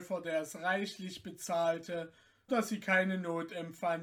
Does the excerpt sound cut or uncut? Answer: cut